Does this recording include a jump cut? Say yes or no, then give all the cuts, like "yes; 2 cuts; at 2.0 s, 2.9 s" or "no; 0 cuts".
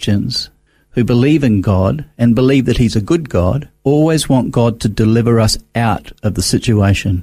yes; 1 cut; at 3.8 s